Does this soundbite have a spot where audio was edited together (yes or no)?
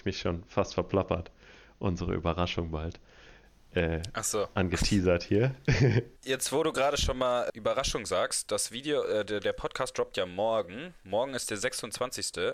yes